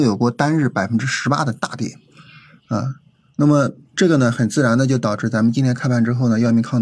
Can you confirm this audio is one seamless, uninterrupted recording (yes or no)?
yes